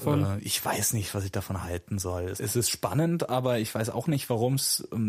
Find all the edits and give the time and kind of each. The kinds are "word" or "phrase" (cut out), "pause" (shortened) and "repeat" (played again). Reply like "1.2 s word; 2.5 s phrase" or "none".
2.4 s word